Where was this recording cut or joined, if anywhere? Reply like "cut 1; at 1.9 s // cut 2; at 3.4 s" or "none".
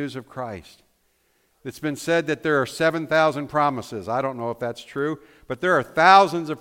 none